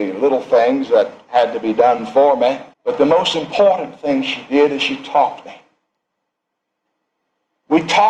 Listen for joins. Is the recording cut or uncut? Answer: cut